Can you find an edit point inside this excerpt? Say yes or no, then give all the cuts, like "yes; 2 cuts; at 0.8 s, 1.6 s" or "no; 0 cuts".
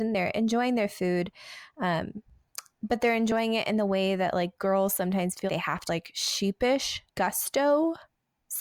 yes; 3 cuts; at 5.5 s, 5.9 s, 7.1 s